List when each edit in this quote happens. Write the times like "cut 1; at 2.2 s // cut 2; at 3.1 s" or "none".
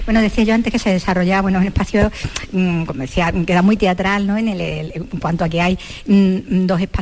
none